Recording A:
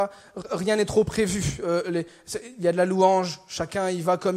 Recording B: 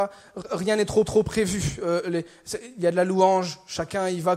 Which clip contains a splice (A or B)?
B